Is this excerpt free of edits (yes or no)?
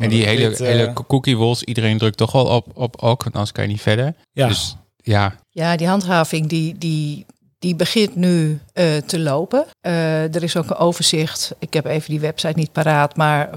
no